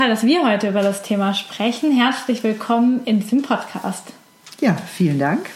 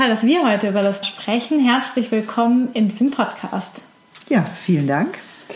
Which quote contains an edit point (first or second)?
second